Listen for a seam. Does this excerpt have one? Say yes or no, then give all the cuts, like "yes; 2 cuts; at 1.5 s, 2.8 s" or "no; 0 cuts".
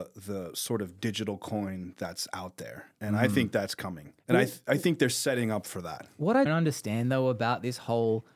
yes; 2 cuts; at 4.2 s, 6.5 s